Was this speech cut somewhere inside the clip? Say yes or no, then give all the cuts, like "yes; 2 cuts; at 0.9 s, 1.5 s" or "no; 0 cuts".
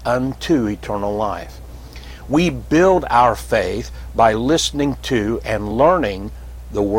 no; 0 cuts